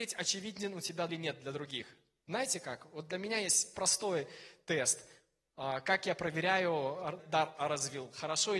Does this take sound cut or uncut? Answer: cut